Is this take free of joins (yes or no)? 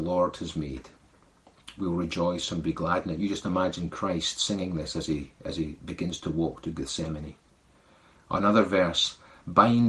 yes